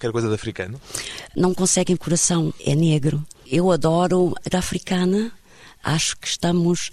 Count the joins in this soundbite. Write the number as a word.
four